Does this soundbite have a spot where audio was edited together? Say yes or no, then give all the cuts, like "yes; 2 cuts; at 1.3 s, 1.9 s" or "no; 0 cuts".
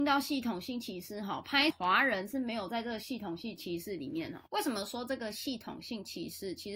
yes; 2 cuts; at 1.7 s, 4.5 s